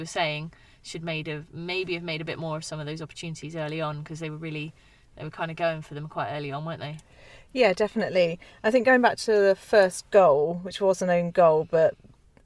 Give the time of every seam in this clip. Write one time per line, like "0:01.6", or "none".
none

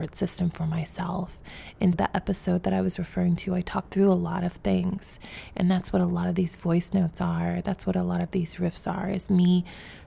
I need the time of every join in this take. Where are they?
0:01.9
0:03.9

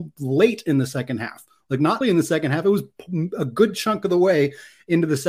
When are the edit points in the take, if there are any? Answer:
0:02.0

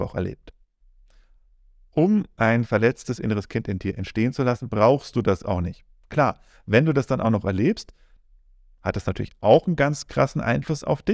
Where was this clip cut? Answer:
none

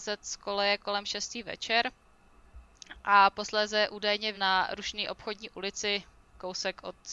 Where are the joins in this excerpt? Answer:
0:04.3

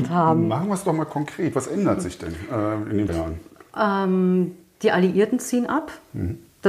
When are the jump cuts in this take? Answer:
0:03.1

